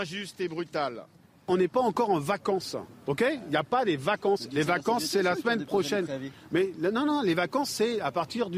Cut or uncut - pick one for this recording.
uncut